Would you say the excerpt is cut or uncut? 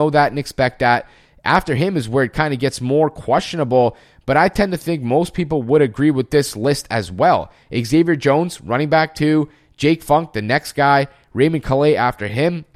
uncut